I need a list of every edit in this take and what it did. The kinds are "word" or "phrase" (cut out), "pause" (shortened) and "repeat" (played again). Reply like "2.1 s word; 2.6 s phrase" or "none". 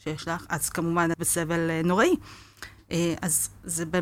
1.1 s word